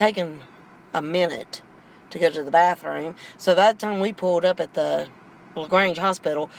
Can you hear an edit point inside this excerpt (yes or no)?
no